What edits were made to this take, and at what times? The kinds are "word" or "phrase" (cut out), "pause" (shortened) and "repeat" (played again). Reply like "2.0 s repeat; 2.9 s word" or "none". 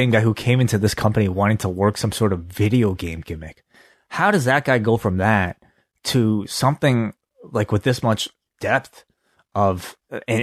none